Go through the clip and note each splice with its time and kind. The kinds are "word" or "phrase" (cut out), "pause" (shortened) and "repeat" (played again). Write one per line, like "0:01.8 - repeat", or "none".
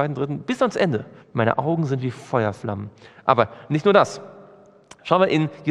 0:01.2 - pause